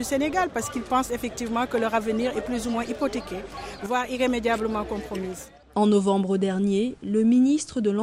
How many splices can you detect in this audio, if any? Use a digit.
0